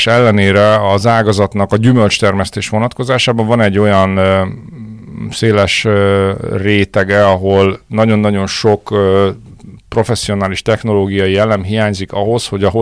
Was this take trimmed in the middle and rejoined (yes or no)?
no